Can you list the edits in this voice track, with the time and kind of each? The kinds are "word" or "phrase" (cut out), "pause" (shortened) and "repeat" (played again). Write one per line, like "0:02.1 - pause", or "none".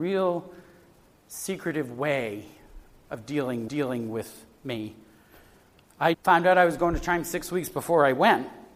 0:03.7 - repeat
0:06.1 - word

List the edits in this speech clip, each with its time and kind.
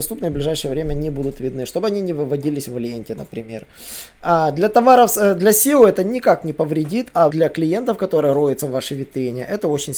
0:07.3 - word

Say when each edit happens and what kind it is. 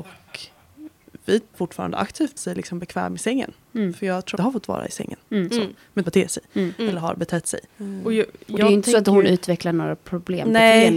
0:01.5 - word
0:02.4 - phrase
0:04.4 - phrase
0:06.0 - phrase
0:07.7 - pause

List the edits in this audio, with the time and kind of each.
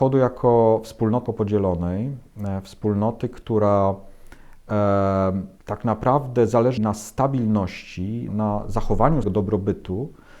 0:01.3 - word
0:05.6 - pause
0:06.8 - word
0:08.3 - word
0:09.2 - word

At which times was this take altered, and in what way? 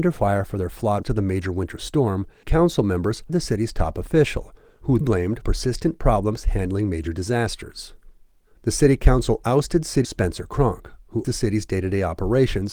0:01.0 - word
0:02.4 - word
0:03.3 - word
0:05.0 - word
0:05.4 - word
0:10.0 - word
0:11.2 - word

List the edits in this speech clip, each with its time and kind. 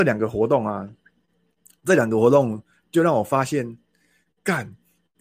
none

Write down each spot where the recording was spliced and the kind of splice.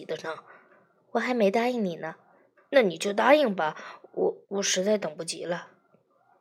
0:04.4 - pause

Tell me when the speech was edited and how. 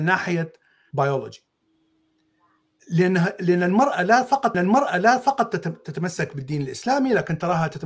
0:00.9 - phrase
0:04.5 - repeat

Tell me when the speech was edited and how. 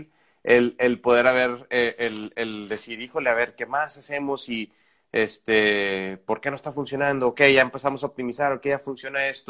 none

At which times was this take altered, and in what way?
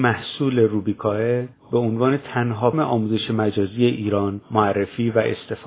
0:02.7 - word

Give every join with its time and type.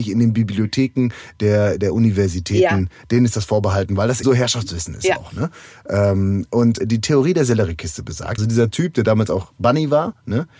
0:04.2 - word
0:06.8 - word
0:08.4 - word

